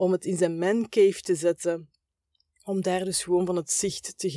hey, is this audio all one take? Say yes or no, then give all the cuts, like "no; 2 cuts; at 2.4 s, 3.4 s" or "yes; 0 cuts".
yes; 0 cuts